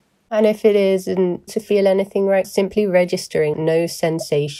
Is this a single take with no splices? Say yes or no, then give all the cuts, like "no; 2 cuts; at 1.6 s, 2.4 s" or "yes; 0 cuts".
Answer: no; 3 cuts; at 1.5 s, 2.4 s, 3.5 s